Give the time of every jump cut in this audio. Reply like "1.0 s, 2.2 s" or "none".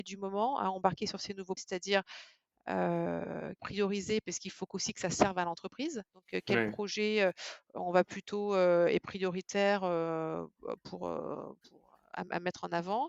1.6 s, 3.6 s, 6.1 s, 11.6 s